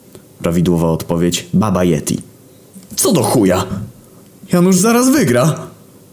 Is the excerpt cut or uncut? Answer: uncut